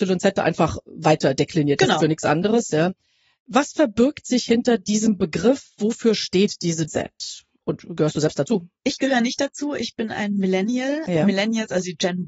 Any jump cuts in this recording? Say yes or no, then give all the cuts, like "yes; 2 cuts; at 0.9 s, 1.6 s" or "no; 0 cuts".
yes; 2 cuts; at 2.0 s, 6.9 s